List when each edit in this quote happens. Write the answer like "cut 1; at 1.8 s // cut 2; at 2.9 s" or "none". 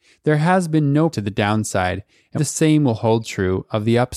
cut 1; at 1.1 s // cut 2; at 2.4 s